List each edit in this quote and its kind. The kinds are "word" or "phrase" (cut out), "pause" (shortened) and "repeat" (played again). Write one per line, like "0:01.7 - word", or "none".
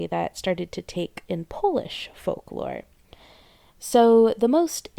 0:01.3 - word

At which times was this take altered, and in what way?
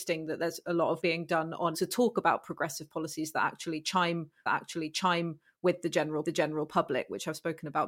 0:01.0 - word
0:01.7 - word
0:04.5 - repeat
0:06.2 - repeat

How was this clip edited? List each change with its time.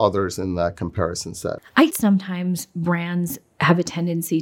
0:01.9 - word

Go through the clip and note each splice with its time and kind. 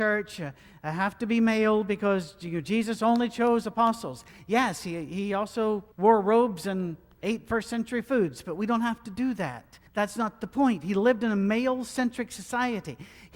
0:05.9 - pause
0:09.9 - pause

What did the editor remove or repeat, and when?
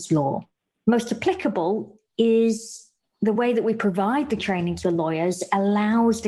none

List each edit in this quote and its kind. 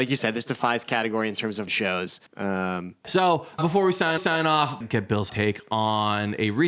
0:01.7 - word
0:02.3 - pause
0:03.6 - word
0:04.2 - repeat
0:04.8 - phrase
0:05.3 - word

